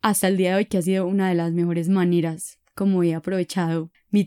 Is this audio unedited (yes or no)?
yes